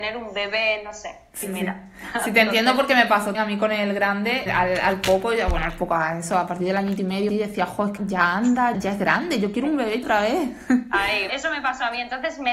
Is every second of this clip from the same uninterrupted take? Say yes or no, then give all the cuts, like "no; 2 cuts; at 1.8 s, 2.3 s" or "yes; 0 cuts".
no; 8 cuts; at 1.4 s, 3.3 s, 4.5 s, 7.3 s, 8.0 s, 8.7 s, 10.0 s, 11.3 s